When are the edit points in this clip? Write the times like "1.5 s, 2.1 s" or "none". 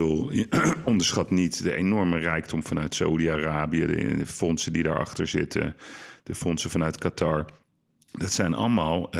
none